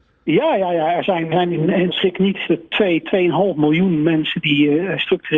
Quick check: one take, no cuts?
no; 3 cuts; at 1.3 s, 1.9 s, 2.5 s

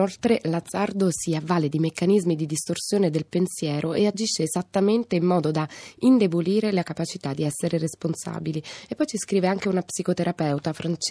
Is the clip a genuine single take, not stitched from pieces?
yes; 0 cuts

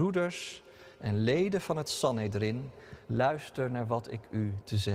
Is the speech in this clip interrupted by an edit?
yes; 2 cuts; at 0.9 s, 3.0 s

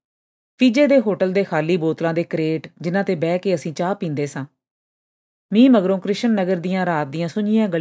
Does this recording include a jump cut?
no; 0 cuts

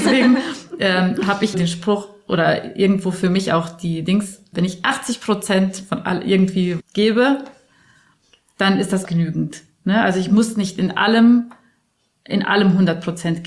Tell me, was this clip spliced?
yes; 4 cuts; at 1.5 s, 4.5 s, 6.8 s, 9.0 s

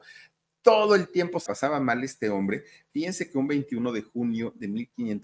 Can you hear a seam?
yes; 1 cut; at 1.5 s

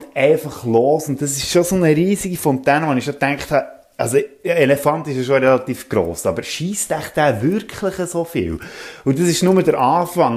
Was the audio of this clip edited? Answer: no; 0 cuts

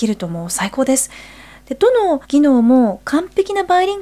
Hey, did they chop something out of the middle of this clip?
yes; 1 cut; at 2.2 s

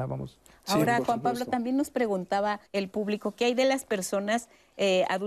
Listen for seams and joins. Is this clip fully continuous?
no; 1 cut; at 2.7 s

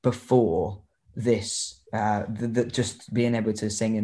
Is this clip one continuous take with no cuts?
no; 1 cut; at 1.9 s

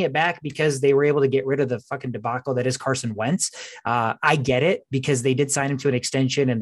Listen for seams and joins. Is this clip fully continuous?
no; 1 cut; at 4.2 s

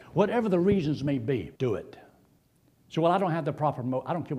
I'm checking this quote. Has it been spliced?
yes; 1 cut; at 1.6 s

